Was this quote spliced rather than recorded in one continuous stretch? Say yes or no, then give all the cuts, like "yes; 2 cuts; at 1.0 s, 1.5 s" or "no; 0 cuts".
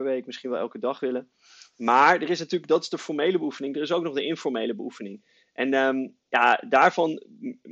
no; 0 cuts